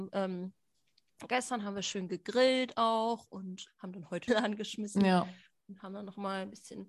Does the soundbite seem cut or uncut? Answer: cut